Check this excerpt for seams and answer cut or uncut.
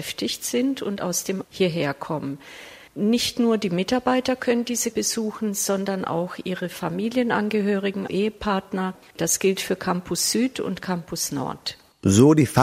cut